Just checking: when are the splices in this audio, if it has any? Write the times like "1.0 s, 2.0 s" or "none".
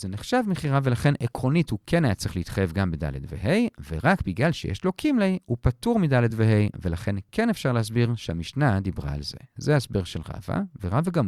none

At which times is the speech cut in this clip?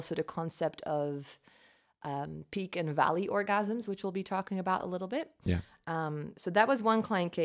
none

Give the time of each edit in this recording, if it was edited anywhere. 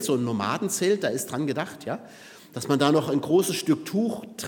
none

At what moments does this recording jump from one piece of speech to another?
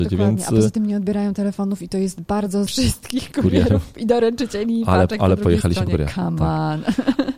2.7 s

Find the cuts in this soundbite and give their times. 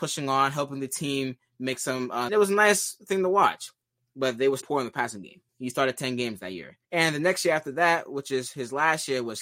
2.3 s, 4.6 s, 5.5 s, 6.8 s

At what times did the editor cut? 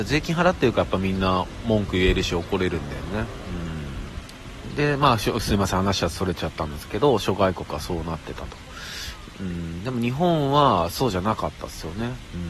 none

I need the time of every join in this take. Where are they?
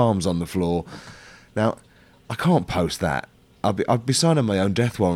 none

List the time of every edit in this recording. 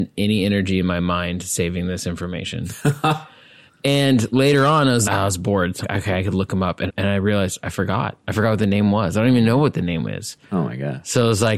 5.0 s, 5.8 s, 6.9 s

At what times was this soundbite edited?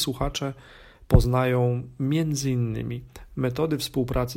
none

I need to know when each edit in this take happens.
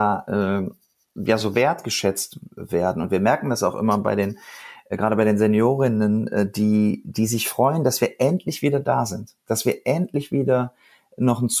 none

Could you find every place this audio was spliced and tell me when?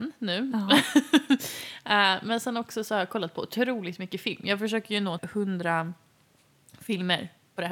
5.2 s

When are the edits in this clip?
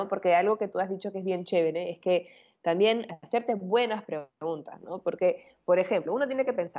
none

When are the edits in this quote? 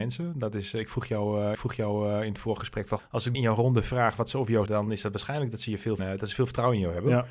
1.5 s, 3.0 s, 3.3 s, 4.7 s, 6.0 s

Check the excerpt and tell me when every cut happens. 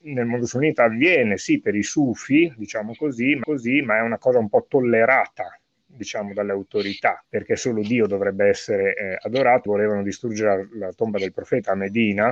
3.4 s, 7.2 s, 9.7 s

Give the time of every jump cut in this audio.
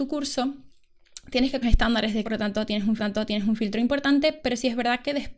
1.6 s, 2.2 s, 3.0 s

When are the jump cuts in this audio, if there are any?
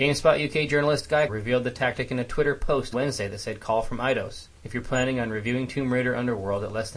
1.3 s, 2.9 s, 4.6 s

